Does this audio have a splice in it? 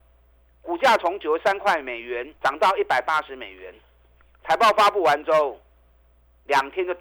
yes; 1 cut; at 2.4 s

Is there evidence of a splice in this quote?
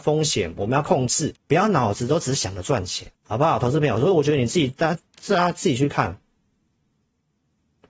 yes; 2 cuts; at 1.4 s, 3.1 s

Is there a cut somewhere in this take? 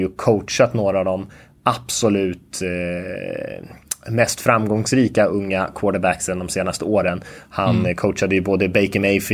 no; 0 cuts

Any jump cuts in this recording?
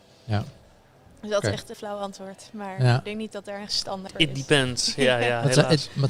yes; 3 cuts; at 1.7 s, 3.7 s, 4.1 s

